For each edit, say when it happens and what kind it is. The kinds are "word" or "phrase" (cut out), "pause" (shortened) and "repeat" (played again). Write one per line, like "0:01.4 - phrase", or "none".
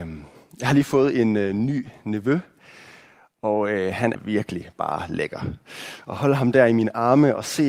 0:04.1 - word